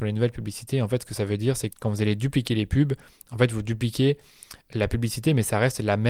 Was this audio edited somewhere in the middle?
yes; 1 cut; at 1.7 s

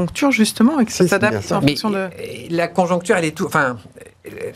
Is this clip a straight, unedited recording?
yes; 0 cuts

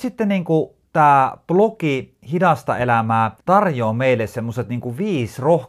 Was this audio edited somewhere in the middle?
yes; 1 cut; at 3.4 s

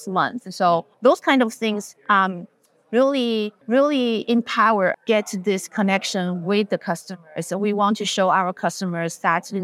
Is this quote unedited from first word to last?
no; 3 cuts; at 0.9 s, 3.6 s, 4.9 s

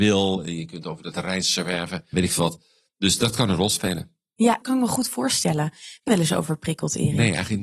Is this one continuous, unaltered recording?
no; 4 cuts; at 1.1 s, 2.1 s, 4.6 s, 6.1 s

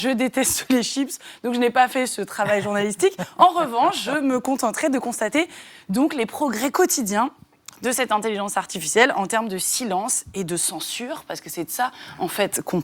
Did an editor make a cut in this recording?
no; 0 cuts

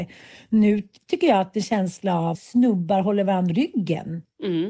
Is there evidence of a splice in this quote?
yes; 3 cuts; at 1.5 s, 2.3 s, 3.5 s

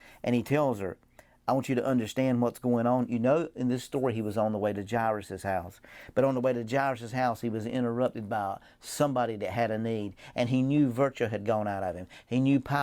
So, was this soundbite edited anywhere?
no; 0 cuts

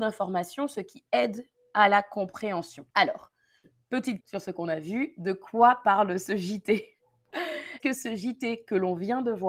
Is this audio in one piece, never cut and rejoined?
no; 3 cuts; at 2.9 s, 4.2 s, 7.8 s

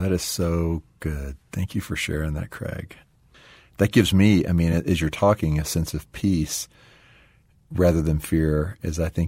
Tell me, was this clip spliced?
no; 0 cuts

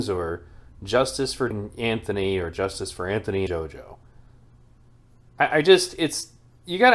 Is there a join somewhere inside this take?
yes; 2 cuts; at 1.5 s, 3.5 s

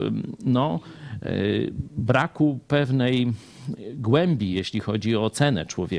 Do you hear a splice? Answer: no; 0 cuts

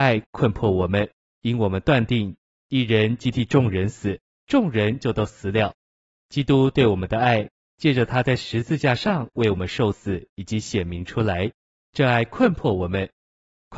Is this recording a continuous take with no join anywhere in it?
yes; 0 cuts

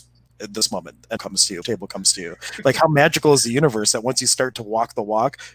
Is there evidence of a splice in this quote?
yes; 2 cuts; at 1.2 s, 1.6 s

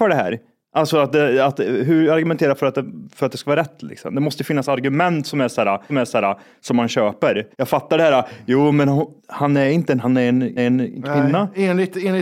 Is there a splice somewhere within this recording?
yes; 5 cuts; at 5.9 s, 7.5 s, 9.2 s, 10.0 s, 10.6 s

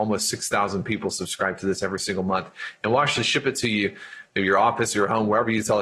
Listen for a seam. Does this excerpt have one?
no; 0 cuts

